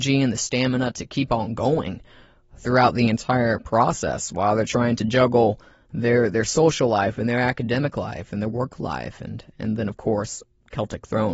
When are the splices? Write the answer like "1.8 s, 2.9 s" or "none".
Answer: none